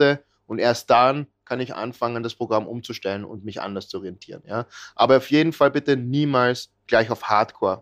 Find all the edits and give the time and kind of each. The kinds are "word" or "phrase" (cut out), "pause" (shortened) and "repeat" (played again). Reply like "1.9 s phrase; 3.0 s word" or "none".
none